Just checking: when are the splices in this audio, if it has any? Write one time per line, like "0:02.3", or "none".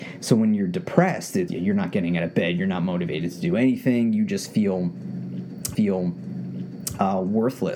0:01.5
0:05.7